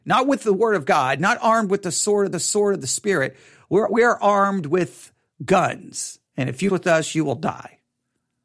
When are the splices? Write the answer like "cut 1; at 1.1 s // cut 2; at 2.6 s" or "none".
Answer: cut 1; at 2.3 s // cut 2; at 6.3 s // cut 3; at 6.7 s